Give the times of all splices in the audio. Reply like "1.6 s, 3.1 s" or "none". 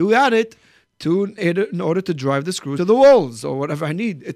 1.4 s, 2.8 s